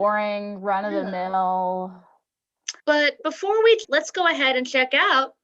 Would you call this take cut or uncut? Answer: cut